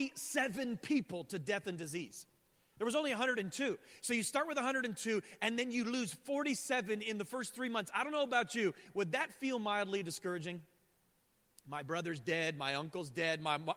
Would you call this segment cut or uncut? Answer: uncut